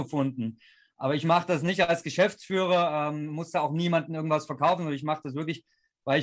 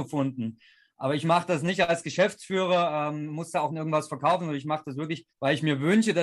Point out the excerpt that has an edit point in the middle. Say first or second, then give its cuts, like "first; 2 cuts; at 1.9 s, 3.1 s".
second; 2 cuts; at 3.7 s, 5.3 s